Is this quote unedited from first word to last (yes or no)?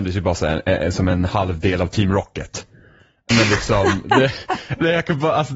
yes